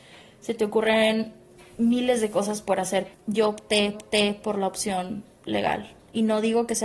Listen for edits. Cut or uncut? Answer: cut